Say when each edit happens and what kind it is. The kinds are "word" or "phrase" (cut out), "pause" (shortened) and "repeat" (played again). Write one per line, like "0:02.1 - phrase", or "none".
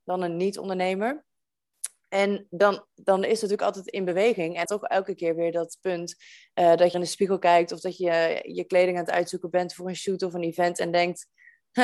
0:04.6 - phrase
0:06.9 - phrase